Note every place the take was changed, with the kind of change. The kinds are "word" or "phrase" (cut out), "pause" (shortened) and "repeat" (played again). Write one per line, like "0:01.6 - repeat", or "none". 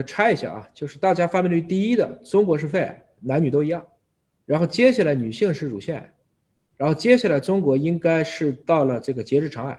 none